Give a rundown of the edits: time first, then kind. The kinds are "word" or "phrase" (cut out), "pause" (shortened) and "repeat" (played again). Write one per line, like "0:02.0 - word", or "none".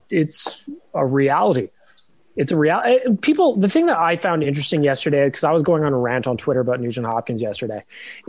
none